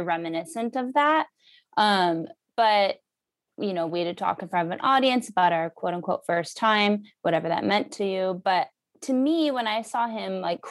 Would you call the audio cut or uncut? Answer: uncut